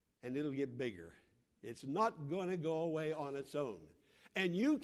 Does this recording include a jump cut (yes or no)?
no